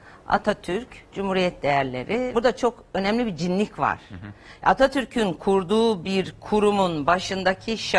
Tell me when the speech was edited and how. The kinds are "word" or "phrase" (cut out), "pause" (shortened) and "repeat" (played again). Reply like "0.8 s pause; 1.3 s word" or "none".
none